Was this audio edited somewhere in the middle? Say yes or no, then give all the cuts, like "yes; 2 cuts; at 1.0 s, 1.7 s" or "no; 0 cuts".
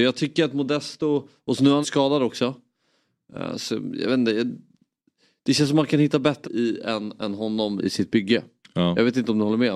yes; 3 cuts; at 1.8 s, 6.4 s, 7.8 s